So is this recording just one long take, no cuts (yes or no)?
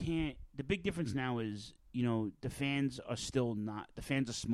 yes